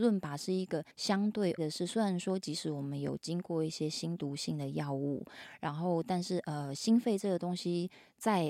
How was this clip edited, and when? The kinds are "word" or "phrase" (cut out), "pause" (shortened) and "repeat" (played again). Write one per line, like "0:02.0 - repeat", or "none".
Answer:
0:00.9 - pause
0:01.6 - word